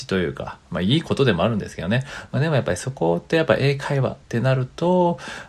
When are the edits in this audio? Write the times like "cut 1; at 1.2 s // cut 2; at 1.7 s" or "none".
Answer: cut 1; at 4.2 s